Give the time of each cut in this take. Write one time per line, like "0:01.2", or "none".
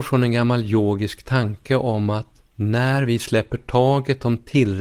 0:02.5